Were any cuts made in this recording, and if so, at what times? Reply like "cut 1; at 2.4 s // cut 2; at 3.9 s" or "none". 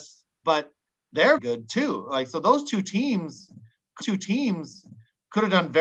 cut 1; at 1.4 s // cut 2; at 4.0 s

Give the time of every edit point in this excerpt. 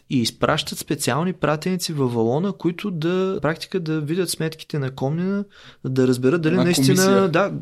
cut 1; at 3.4 s

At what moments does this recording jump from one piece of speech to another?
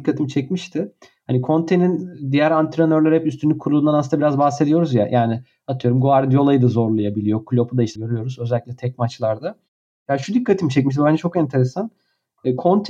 cut 1; at 8.0 s

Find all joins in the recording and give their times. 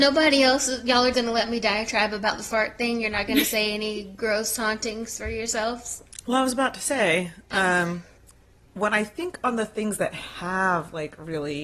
cut 1; at 1.1 s // cut 2; at 8.2 s

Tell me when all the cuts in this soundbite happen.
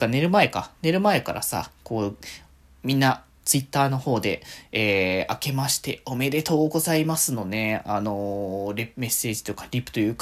none

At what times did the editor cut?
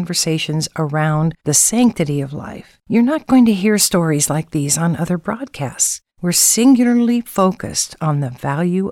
cut 1; at 1.4 s // cut 2; at 2.8 s // cut 3; at 6.1 s

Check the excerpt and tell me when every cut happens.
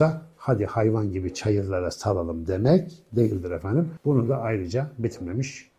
none

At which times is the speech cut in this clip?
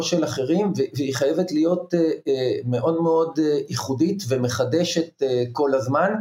none

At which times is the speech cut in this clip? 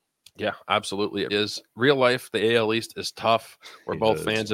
cut 1; at 1.3 s

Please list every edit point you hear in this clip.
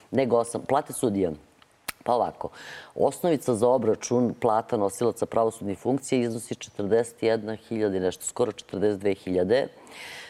none

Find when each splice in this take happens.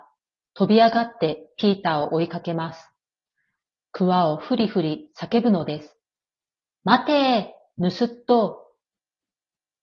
none

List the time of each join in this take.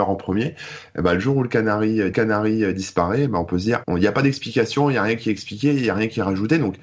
cut 1; at 2.1 s // cut 2; at 3.8 s

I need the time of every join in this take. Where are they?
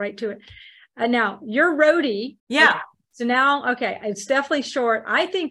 cut 1; at 2.4 s

